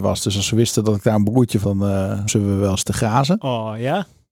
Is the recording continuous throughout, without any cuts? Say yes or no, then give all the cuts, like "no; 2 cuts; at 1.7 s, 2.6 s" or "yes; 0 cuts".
no; 2 cuts; at 1.6 s, 2.3 s